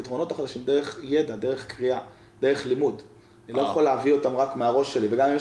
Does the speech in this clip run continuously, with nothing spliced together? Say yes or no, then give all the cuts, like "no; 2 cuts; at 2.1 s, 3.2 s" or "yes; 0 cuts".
yes; 0 cuts